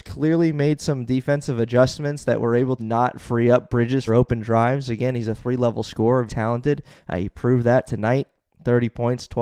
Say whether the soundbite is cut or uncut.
cut